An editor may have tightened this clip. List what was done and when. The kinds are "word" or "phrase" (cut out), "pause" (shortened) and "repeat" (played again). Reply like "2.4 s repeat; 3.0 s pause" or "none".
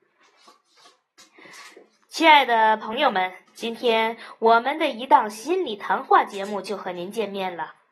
3.5 s pause